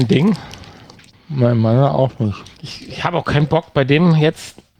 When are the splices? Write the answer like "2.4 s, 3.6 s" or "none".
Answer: 2.5 s

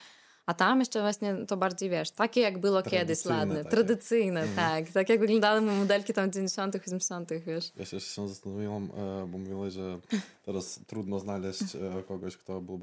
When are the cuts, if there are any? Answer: 2.1 s

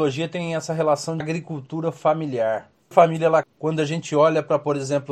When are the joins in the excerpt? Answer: 1.2 s, 2.9 s, 3.4 s

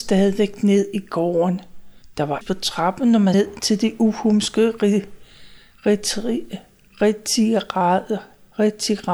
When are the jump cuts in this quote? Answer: 2.0 s, 2.4 s, 3.3 s

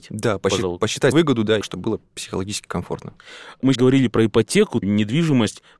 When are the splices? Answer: 1.1 s, 1.6 s, 3.7 s, 4.8 s

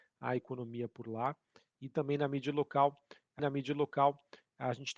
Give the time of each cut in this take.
3.4 s

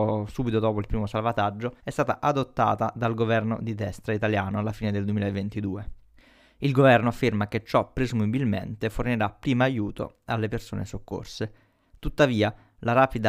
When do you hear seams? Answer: 1.8 s, 6.1 s

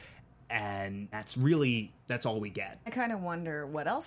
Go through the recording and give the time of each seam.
1.1 s, 2.9 s

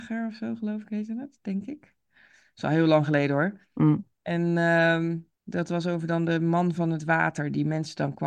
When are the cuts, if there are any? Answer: 4.1 s, 5.3 s

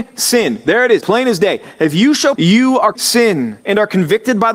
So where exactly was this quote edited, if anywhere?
1.0 s, 2.3 s, 2.9 s, 3.6 s

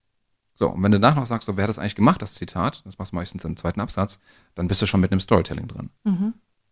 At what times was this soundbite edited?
none

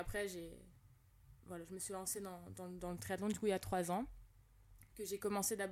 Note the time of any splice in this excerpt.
none

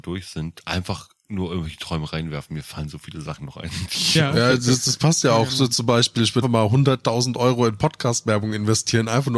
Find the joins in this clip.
6.4 s

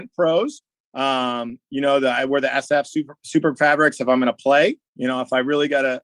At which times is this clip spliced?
4.9 s

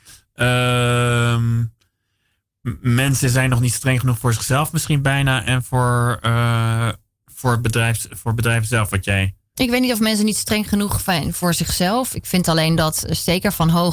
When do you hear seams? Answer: 7.1 s, 9.4 s

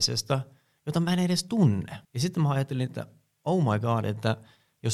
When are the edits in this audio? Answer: 2.0 s

